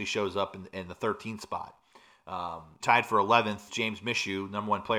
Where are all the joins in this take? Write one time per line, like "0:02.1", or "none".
0:02.8
0:03.7